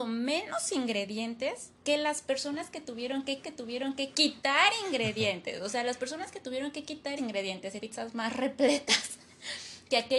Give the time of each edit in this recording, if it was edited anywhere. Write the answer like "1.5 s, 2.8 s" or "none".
1.7 s, 3.4 s, 7.2 s, 7.8 s